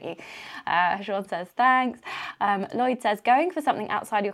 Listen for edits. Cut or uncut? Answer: uncut